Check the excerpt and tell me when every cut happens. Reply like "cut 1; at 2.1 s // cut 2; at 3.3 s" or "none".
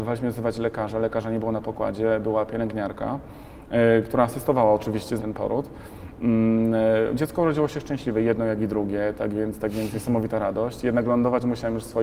cut 1; at 5.2 s